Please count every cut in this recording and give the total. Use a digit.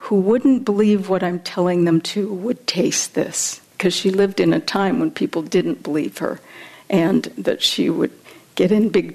1